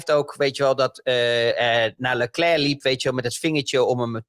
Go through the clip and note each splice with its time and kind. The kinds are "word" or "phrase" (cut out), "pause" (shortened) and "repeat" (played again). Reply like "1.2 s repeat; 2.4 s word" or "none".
1.5 s phrase